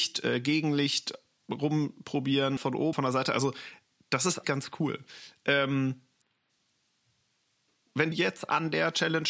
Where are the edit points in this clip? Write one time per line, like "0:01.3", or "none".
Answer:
0:02.6
0:02.9
0:04.4
0:08.1